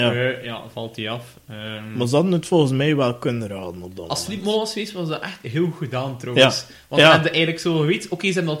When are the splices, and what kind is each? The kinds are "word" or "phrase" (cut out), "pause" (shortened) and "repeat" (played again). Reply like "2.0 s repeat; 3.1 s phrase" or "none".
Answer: none